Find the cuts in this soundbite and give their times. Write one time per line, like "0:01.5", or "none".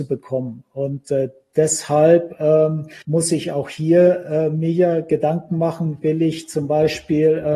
0:03.0